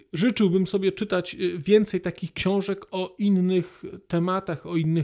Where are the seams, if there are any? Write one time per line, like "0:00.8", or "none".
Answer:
none